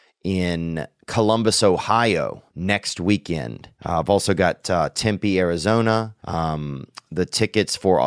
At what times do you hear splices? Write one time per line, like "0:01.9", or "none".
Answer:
0:02.5
0:03.7
0:06.2